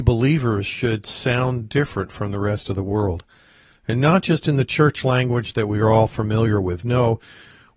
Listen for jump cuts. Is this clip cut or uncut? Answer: uncut